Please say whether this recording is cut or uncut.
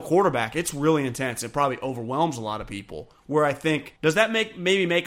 cut